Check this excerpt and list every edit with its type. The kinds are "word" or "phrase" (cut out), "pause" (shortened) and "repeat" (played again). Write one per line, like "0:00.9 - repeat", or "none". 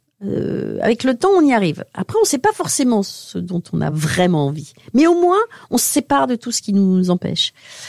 none